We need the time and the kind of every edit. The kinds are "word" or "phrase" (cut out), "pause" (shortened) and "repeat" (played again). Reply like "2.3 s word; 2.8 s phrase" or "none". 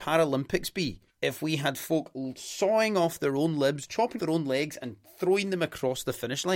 1.1 s pause; 4.2 s word